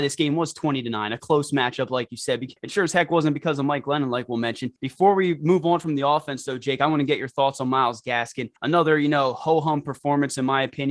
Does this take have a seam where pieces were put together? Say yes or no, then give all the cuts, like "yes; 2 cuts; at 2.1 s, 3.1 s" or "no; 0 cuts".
yes; 3 cuts; at 2.6 s, 4.8 s, 8.6 s